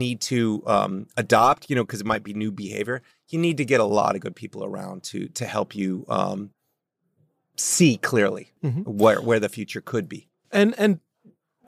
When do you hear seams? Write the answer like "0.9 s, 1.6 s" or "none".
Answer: none

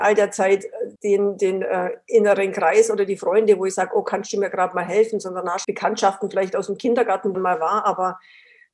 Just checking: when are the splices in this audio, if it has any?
1.0 s, 5.6 s, 7.3 s

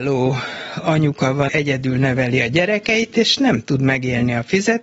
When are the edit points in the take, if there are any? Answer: 1.5 s

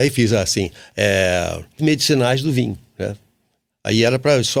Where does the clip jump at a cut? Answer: 1.8 s

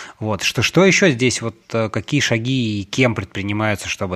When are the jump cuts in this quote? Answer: none

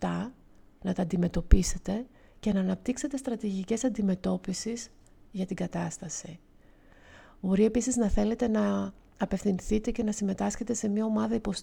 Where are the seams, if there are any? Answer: none

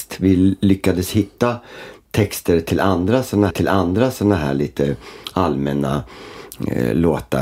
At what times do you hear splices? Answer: 3.5 s

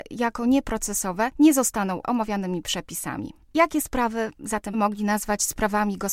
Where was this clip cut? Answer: 2.0 s, 3.4 s, 4.7 s

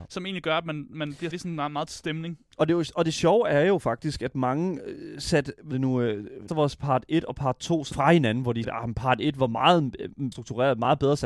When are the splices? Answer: 1.3 s, 1.9 s, 5.7 s, 6.5 s, 7.9 s, 8.6 s, 10.3 s

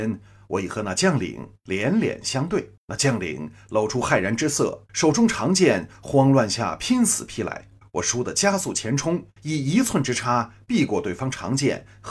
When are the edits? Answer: 2.8 s, 4.9 s, 7.8 s, 9.4 s

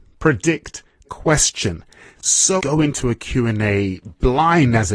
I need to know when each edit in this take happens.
1.1 s, 2.6 s

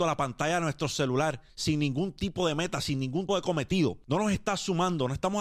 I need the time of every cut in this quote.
1.5 s, 3.3 s

